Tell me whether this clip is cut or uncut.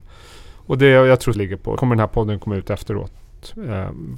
cut